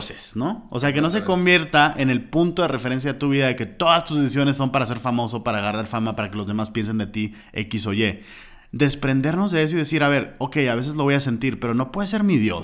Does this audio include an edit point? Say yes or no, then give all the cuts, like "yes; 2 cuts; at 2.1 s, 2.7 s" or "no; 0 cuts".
no; 0 cuts